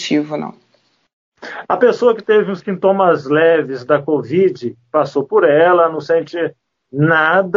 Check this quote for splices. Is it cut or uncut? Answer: uncut